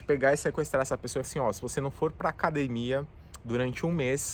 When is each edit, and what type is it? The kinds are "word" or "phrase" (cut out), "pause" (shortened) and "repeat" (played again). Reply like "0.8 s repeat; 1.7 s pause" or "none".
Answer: 1.2 s word